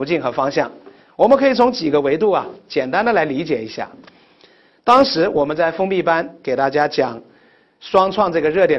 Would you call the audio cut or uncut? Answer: uncut